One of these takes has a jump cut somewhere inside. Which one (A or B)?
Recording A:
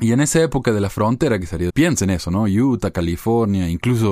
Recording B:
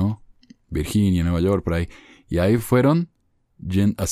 A